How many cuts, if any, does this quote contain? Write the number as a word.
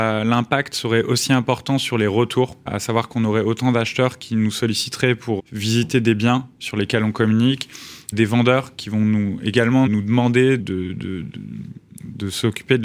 five